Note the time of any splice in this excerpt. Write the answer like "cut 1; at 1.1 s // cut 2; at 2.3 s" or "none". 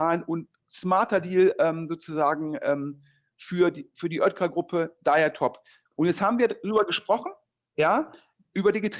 none